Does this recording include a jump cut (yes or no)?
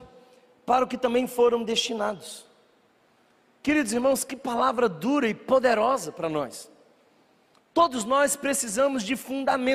no